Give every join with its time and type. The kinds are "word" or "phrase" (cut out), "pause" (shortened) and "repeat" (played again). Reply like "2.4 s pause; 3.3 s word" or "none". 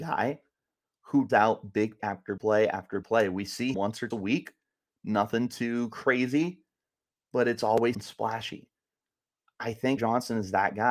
1.3 s word; 2.0 s word; 2.4 s word; 3.0 s word; 3.7 s word; 4.1 s word; 7.9 s word; 10.0 s word